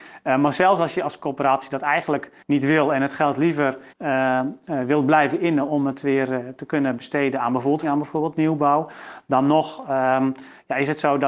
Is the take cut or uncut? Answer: cut